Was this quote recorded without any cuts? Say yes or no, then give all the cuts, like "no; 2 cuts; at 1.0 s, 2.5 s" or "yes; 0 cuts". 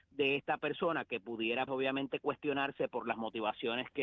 no; 1 cut; at 1.7 s